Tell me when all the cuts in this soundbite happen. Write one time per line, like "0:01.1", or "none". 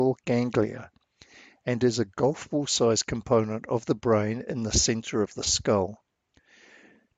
none

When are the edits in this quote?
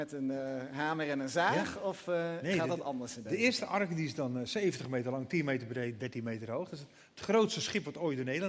none

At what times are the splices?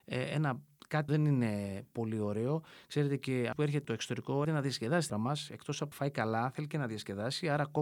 0:01.1
0:03.5
0:03.8
0:04.4
0:05.1
0:05.9

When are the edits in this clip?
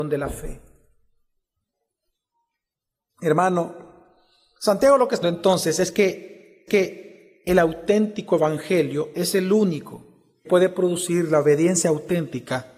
0:05.2
0:06.7
0:10.4

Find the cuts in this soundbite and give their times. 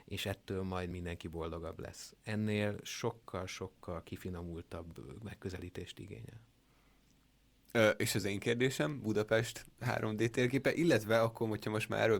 none

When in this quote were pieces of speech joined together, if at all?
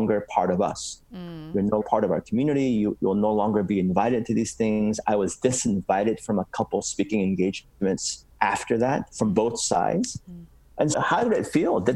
0:01.8
0:10.2
0:10.9

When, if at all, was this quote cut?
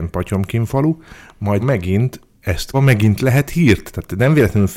0:01.6
0:02.7

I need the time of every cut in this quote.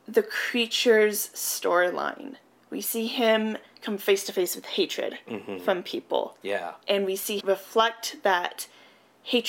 0:07.4

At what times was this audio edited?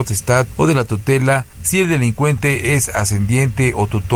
0:01.5

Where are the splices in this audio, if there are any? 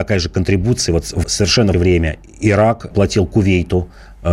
0:01.2
0:01.7
0:02.9

